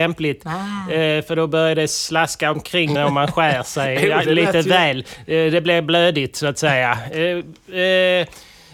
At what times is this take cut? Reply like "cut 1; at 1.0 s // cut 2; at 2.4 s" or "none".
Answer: cut 1; at 3.0 s